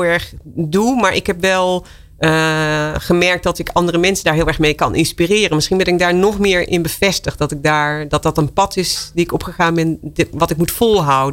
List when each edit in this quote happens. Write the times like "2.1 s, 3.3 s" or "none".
none